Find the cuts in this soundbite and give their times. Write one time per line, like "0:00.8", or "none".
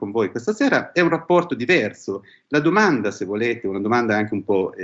none